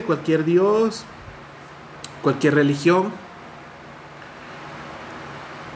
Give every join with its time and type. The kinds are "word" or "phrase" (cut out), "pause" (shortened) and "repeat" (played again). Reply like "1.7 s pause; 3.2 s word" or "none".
none